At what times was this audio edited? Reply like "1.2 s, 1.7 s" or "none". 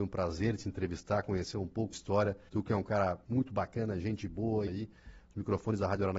1.9 s, 2.5 s, 3.2 s, 4.7 s